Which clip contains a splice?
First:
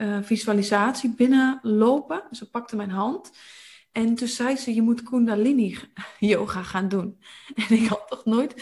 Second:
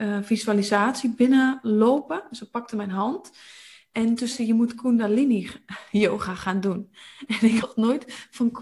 second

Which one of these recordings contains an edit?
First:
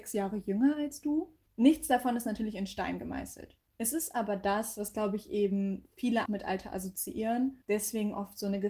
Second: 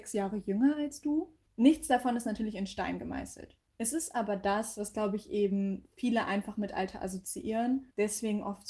first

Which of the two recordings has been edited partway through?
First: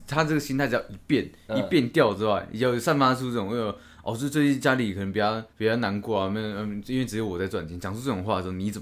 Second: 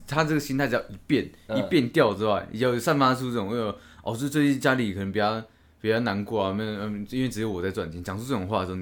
first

